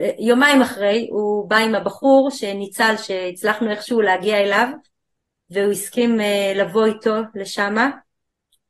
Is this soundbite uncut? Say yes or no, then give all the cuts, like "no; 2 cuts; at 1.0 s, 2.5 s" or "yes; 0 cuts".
yes; 0 cuts